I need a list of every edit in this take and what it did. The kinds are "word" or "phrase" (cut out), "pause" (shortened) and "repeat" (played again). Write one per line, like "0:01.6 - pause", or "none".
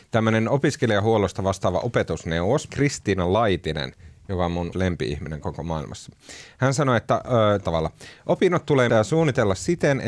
0:02.7 - word
0:04.7 - word
0:07.6 - word
0:08.9 - word